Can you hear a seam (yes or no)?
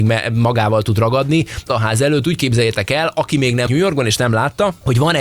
yes